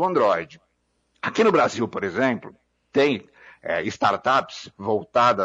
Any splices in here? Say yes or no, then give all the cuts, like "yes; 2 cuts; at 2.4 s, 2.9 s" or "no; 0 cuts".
no; 0 cuts